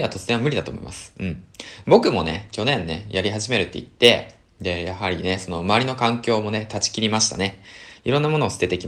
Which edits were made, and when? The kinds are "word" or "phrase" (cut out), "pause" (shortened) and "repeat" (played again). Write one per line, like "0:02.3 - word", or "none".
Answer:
none

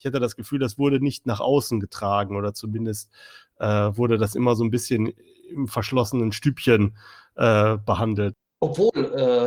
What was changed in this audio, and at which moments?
none

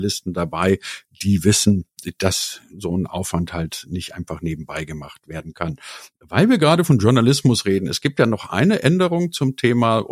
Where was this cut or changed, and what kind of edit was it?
none

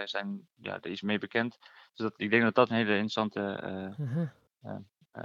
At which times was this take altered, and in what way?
0:01.0 - word
0:02.2 - word
0:02.7 - word

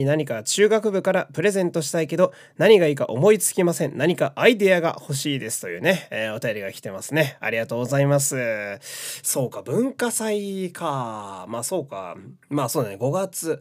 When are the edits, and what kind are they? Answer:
0:12.4 - pause

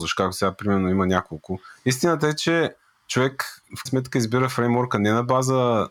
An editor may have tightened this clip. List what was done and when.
0:03.9 - word

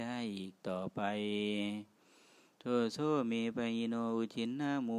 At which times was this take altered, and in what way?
none

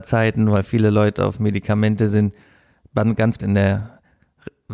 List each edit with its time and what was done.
0:03.4 - word

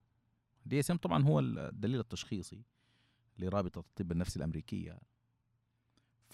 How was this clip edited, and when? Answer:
none

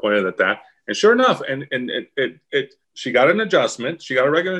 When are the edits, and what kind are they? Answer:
0:02.8 - pause

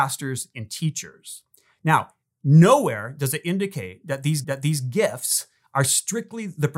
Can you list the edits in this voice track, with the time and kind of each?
0:04.4 - repeat

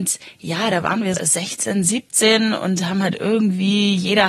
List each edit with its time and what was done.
0:01.1 - word

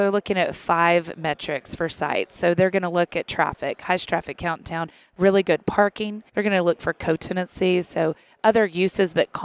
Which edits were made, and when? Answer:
0:06.3 - pause

